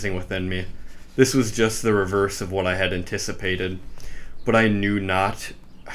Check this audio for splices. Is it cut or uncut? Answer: uncut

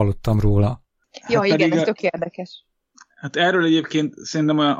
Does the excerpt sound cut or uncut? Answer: uncut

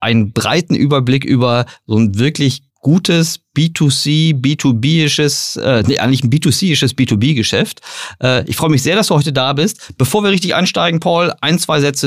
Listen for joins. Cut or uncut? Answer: cut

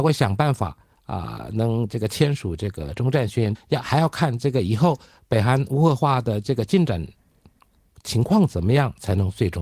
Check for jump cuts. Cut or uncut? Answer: cut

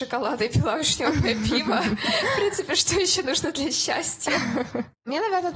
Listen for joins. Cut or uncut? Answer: uncut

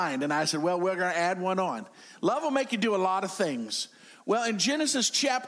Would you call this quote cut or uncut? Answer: uncut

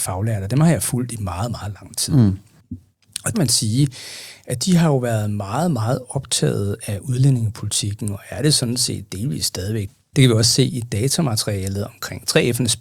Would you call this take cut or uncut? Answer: cut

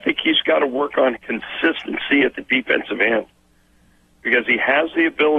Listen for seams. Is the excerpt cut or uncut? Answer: cut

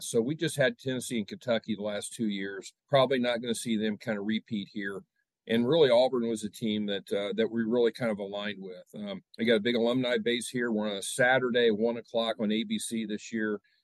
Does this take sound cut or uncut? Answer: cut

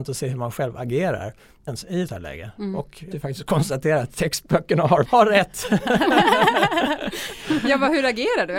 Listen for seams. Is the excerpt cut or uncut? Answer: cut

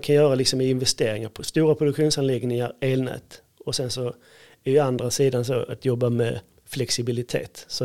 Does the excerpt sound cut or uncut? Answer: uncut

